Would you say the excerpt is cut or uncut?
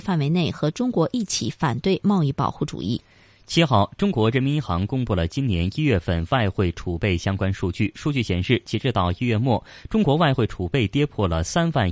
uncut